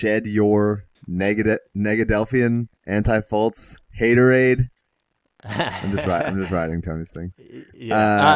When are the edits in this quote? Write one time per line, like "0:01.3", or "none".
0:00.9
0:02.8
0:03.9